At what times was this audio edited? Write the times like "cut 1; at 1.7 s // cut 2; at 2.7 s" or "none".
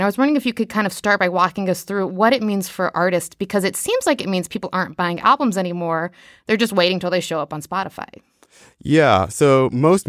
none

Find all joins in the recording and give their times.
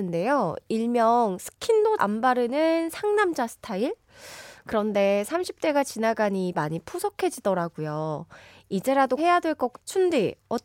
cut 1; at 2.0 s // cut 2; at 6.5 s // cut 3; at 9.2 s // cut 4; at 9.7 s

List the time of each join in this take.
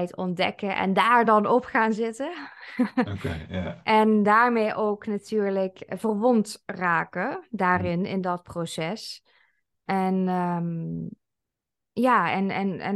none

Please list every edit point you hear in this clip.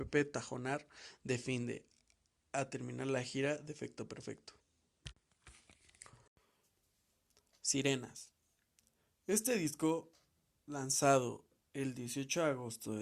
none

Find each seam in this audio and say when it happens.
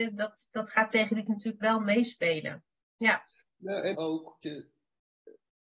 cut 1; at 1.3 s // cut 2; at 3.9 s // cut 3; at 4.4 s

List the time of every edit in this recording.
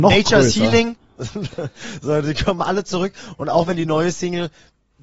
none

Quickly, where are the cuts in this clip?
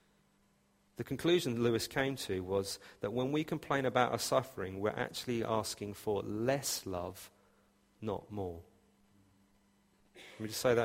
none

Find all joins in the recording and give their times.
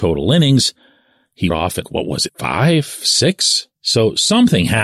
cut 1; at 1.5 s // cut 2; at 1.8 s // cut 3; at 2.3 s // cut 4; at 3.7 s

